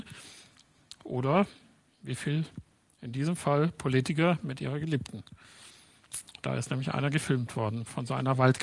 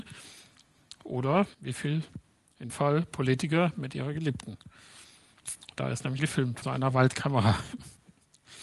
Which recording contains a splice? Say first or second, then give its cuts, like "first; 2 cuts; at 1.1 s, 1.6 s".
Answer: second; 4 cuts; at 1.5 s, 2.7 s, 6.2 s, 6.6 s